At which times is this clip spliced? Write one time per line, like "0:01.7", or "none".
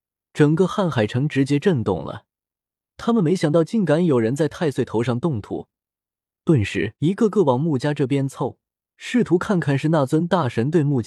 0:07.0